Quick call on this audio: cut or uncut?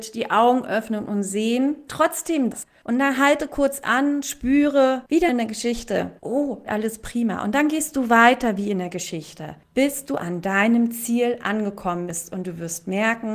cut